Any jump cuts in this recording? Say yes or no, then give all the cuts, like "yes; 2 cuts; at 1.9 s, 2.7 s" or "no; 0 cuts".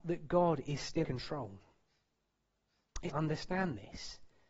yes; 2 cuts; at 1.0 s, 3.1 s